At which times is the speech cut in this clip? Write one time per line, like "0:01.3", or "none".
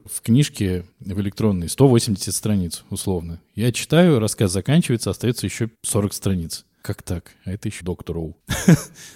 0:00.9
0:05.7
0:07.8